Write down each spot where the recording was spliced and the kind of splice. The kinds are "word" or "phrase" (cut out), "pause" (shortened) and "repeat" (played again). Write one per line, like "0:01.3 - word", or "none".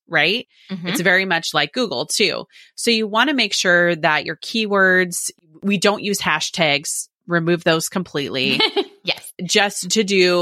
0:09.3 - pause

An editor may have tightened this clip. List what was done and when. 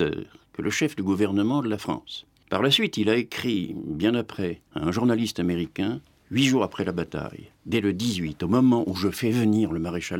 0:04.7 - pause
0:06.2 - word
0:07.6 - pause

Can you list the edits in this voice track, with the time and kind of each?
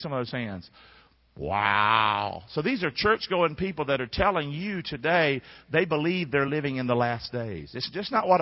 none

